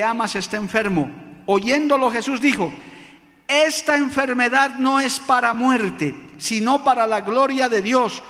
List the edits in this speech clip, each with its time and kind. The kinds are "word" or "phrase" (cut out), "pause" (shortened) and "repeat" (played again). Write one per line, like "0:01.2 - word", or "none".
none